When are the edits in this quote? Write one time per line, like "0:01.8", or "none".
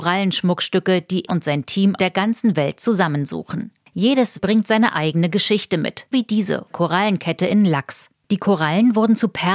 0:01.3
0:02.0
0:04.4
0:06.1
0:06.7